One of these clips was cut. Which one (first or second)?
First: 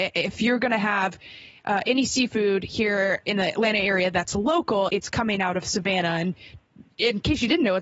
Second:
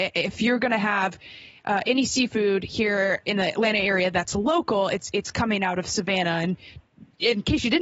first